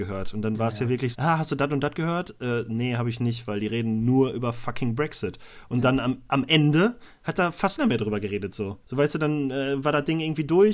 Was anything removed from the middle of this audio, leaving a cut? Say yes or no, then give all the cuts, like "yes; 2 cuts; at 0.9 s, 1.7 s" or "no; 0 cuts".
yes; 3 cuts; at 1.1 s, 7.8 s, 8.8 s